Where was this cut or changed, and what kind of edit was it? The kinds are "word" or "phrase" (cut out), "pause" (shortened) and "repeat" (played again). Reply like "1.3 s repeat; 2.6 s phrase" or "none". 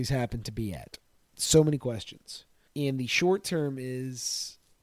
2.7 s pause